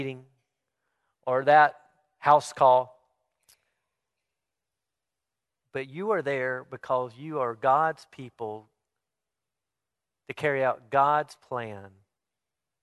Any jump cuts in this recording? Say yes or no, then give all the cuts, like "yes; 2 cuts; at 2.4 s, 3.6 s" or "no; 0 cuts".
no; 0 cuts